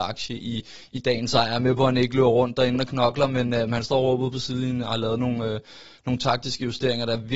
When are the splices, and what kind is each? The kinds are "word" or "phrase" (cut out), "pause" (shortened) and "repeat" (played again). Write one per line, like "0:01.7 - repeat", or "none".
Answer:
none